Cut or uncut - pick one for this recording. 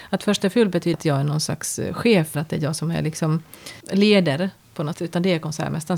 cut